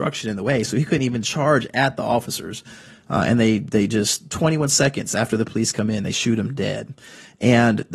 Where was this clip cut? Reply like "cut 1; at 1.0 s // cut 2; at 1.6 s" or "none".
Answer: none